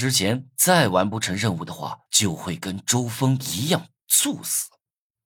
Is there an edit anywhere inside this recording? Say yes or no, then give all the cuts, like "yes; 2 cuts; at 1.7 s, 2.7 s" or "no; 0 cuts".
yes; 1 cut; at 2.1 s